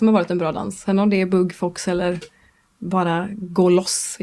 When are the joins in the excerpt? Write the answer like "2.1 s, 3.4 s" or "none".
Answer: none